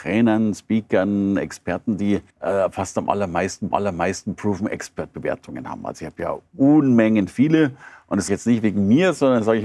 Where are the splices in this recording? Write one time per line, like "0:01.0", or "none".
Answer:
0:02.3
0:03.7
0:08.3